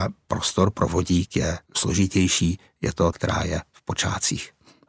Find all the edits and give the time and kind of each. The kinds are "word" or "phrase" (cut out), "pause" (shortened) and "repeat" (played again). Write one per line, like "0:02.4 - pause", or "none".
0:01.7 - pause
0:03.1 - word

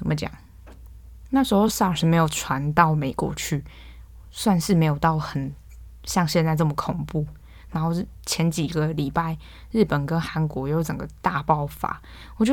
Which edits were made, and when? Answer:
none

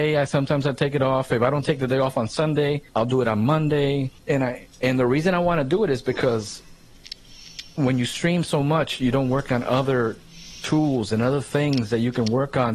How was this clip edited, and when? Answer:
0:02.9 - pause
0:04.2 - pause
0:04.7 - pause

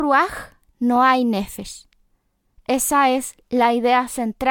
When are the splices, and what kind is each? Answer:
none

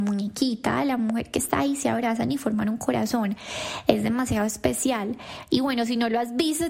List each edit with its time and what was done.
none

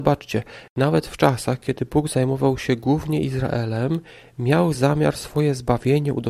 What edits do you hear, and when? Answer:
none

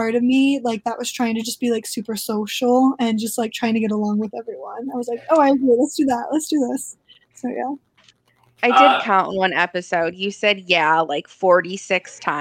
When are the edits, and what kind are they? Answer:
none

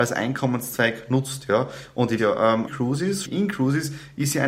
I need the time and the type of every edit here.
0:02.2 - word
0:02.7 - word
0:03.2 - word

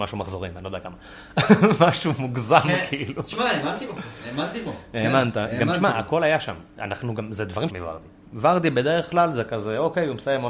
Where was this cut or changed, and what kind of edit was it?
0:07.7 - phrase

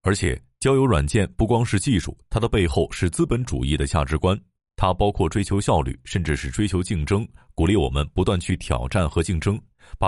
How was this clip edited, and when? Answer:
none

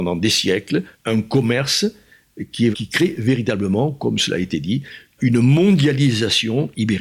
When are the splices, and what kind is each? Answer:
0:00.9 - pause
0:02.7 - word
0:05.2 - word

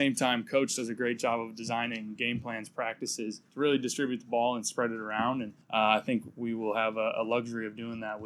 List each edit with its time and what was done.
0:03.4 - pause
0:05.6 - pause

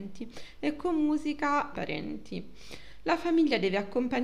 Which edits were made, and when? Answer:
0:01.7 - phrase

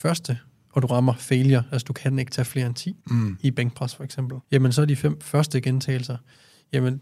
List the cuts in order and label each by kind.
0:03.0 - pause
0:04.4 - pause

